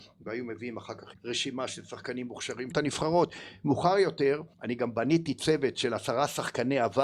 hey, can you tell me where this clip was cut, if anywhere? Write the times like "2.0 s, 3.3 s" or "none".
1.1 s, 2.7 s, 4.5 s